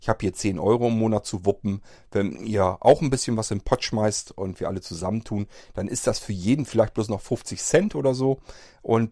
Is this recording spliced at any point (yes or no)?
no